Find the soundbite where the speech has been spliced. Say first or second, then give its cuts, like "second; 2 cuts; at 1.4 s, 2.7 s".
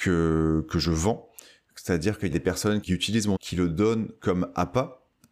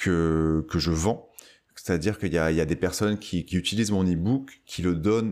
first; 3 cuts; at 2.3 s, 2.8 s, 3.4 s